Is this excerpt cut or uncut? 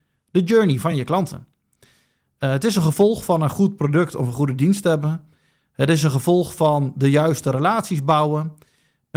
uncut